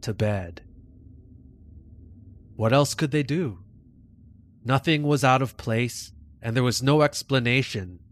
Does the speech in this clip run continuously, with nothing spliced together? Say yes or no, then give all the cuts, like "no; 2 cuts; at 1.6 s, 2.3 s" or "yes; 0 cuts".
yes; 0 cuts